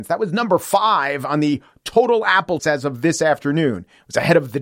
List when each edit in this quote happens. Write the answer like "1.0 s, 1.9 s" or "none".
2.6 s